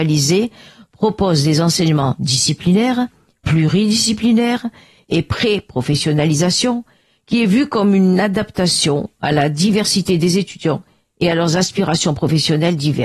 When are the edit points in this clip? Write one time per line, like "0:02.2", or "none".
none